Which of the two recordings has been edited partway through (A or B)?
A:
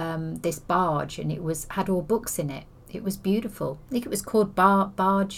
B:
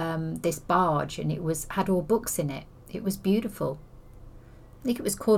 A